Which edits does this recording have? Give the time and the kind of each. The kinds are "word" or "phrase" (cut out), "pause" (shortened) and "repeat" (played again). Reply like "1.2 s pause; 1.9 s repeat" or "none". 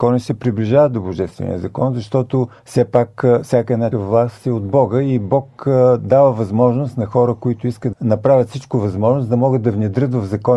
2.6 s pause; 3.9 s word; 7.9 s phrase